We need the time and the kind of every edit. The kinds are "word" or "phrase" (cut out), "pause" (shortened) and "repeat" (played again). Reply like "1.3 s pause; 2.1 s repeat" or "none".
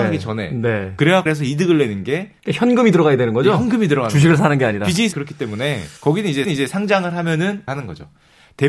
1.3 s word; 2.4 s pause; 5.1 s word; 6.0 s pause; 6.4 s repeat; 7.7 s word